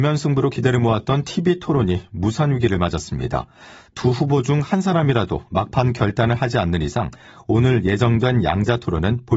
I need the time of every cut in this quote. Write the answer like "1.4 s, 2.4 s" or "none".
none

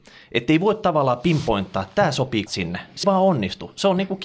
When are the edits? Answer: 2.5 s, 3.0 s

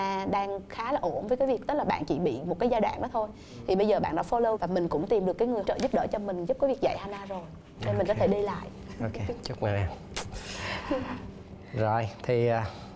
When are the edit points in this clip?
4.6 s, 5.6 s

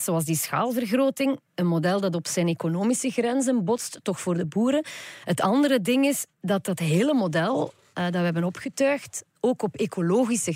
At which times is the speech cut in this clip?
none

